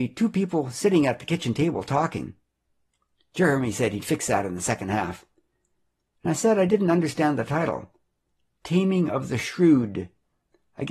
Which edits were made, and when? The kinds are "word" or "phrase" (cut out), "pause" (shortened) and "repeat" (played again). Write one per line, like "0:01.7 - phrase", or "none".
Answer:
none